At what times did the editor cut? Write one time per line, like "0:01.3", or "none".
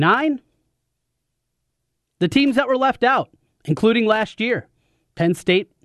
none

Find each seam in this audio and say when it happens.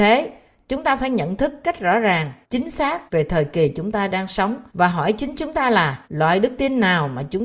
0:02.4
0:03.1
0:04.7
0:06.0

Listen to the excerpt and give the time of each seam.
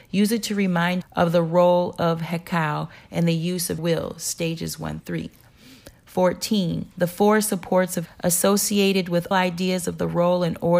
0:01.0
0:03.8
0:05.0
0:06.9
0:08.1
0:09.3

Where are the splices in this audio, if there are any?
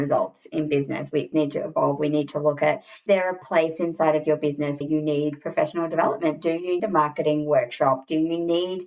0:01.3
0:03.1
0:04.8
0:06.8

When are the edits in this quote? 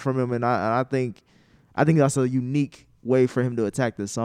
none

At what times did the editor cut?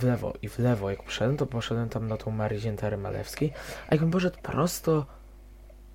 none

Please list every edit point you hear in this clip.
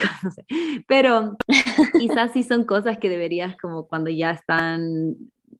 none

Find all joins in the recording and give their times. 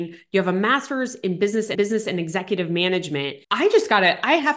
0:01.7
0:03.4

